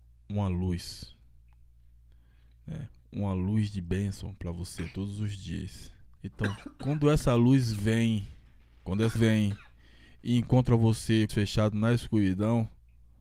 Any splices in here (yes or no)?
yes